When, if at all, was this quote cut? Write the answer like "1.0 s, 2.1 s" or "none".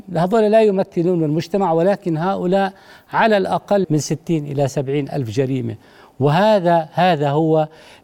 3.8 s